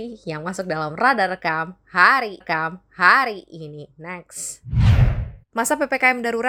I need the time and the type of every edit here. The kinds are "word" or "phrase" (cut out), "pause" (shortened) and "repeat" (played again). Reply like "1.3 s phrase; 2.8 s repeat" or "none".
2.4 s repeat; 5.4 s pause